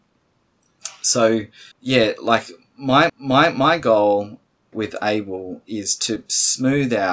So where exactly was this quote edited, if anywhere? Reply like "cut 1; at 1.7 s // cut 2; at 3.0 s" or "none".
cut 1; at 1.7 s // cut 2; at 3.1 s // cut 3; at 4.7 s